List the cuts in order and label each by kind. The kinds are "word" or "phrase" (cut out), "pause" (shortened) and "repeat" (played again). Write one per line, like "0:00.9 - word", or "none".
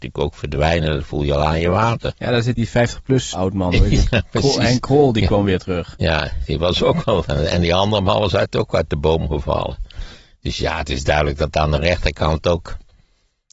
0:02.6 - word
0:03.3 - word